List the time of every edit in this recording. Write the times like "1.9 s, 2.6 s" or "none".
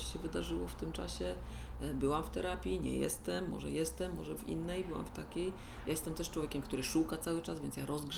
4.4 s

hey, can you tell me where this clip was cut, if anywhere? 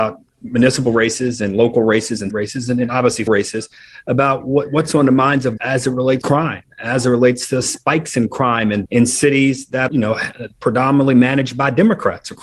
2.3 s, 3.3 s, 5.6 s, 6.2 s, 8.8 s, 9.9 s

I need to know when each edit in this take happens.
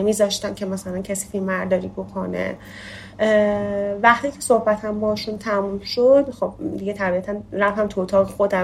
none

